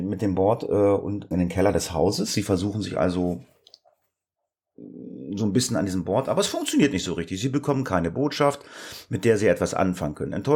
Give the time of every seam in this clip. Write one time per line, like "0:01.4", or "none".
0:01.3